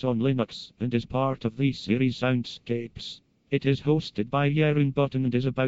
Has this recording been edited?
no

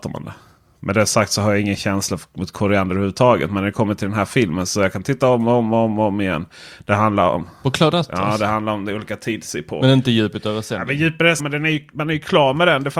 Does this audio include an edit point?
yes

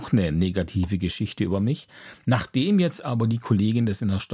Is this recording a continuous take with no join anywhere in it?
yes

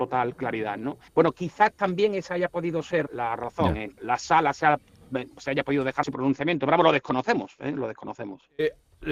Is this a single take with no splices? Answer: no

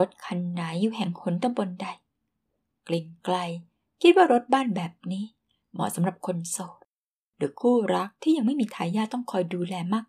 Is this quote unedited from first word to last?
yes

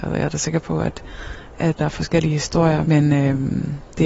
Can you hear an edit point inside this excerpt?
yes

